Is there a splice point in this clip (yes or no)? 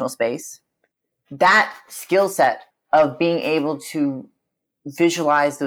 yes